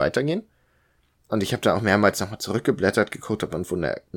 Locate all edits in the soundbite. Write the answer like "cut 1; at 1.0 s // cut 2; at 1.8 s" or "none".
none